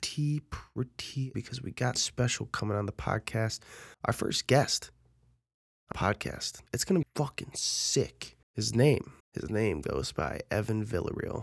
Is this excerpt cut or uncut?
cut